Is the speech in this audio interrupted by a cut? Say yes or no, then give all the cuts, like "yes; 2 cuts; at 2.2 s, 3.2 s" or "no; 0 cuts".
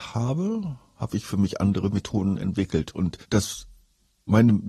yes; 1 cut; at 3.2 s